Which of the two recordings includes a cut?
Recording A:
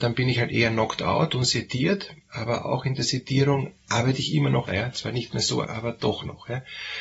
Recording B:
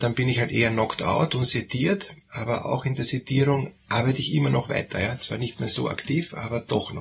A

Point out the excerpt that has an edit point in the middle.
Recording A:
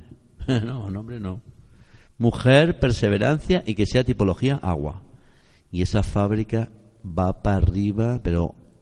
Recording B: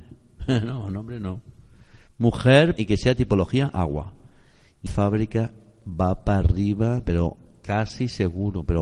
B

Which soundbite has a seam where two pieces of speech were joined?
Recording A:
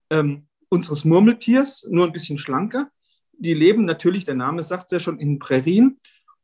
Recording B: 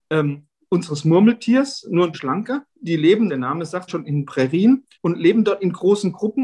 B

